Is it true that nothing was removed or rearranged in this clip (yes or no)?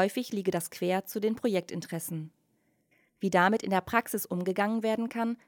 yes